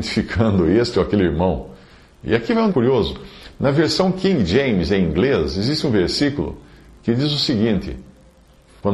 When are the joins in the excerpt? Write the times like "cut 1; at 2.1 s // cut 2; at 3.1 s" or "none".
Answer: cut 1; at 2.7 s